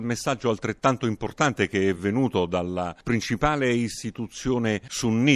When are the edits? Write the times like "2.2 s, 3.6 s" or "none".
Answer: none